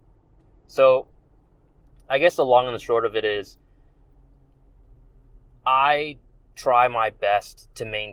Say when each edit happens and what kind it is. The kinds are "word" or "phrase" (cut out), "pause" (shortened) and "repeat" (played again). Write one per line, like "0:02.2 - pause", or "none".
none